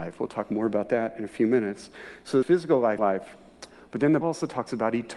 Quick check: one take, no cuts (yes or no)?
no